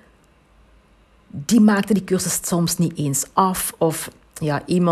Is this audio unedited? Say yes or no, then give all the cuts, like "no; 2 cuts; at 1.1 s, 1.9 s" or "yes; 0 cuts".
yes; 0 cuts